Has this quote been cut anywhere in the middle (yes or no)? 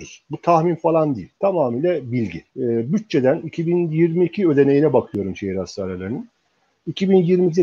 yes